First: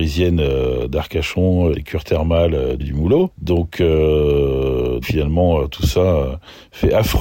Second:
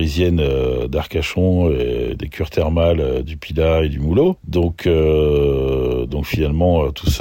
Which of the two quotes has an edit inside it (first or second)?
first